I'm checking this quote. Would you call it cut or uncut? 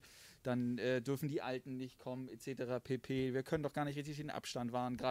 uncut